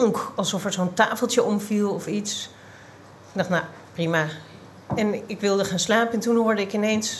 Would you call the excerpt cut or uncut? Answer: uncut